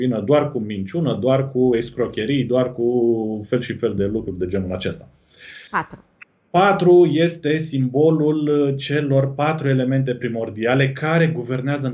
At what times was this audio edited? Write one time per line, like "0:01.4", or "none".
0:05.7